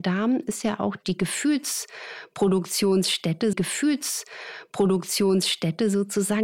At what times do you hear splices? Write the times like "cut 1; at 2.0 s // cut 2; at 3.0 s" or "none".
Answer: cut 1; at 3.5 s